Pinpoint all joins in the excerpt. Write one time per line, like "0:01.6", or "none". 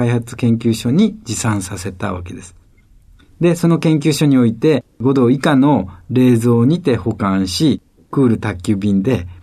none